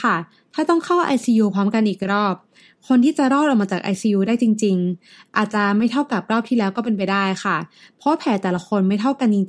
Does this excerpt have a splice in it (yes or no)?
no